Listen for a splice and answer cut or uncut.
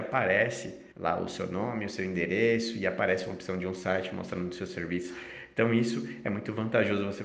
cut